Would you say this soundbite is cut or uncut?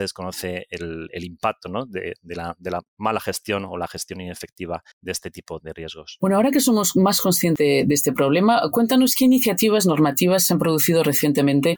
cut